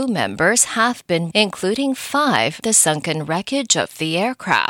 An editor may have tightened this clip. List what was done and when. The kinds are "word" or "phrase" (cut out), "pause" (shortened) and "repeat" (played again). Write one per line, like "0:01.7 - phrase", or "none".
0:01.3 - word
0:02.6 - word